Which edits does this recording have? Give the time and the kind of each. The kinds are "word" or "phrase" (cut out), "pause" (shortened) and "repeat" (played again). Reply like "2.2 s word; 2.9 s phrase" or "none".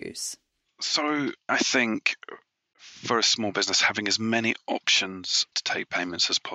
1.5 s word; 5.5 s word